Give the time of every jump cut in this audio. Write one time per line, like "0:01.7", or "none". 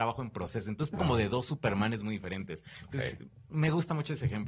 0:00.9